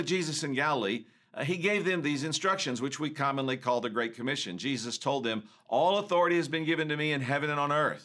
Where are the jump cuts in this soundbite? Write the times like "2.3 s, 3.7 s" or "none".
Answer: none